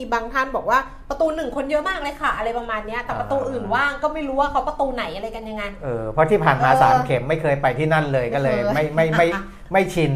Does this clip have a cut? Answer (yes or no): no